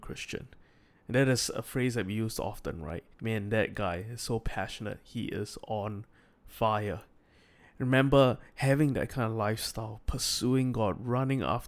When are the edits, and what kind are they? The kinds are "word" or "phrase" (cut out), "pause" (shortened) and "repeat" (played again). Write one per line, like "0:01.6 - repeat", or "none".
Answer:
0:03.1 - pause